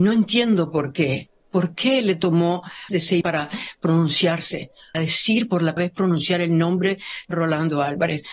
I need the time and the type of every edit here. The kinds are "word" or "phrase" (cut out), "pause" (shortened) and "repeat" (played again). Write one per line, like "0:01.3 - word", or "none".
0:02.9 - word
0:03.2 - word
0:04.9 - word
0:05.8 - word
0:07.3 - word